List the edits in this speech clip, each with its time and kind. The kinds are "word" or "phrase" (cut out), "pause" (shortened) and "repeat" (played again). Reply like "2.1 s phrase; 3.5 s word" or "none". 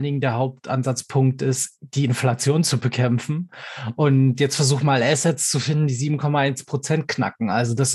none